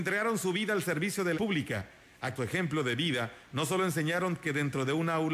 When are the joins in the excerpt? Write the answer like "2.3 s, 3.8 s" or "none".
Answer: 1.3 s, 2.4 s